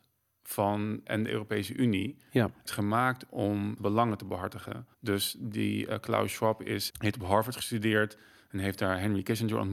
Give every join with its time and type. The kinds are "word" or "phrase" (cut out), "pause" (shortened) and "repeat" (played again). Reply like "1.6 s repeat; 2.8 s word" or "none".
1.1 s phrase; 2.7 s phrase; 3.8 s word; 4.9 s pause; 6.9 s word